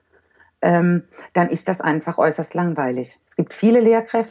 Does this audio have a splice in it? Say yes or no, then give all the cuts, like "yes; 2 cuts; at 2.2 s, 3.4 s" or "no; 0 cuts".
yes; 1 cut; at 3.2 s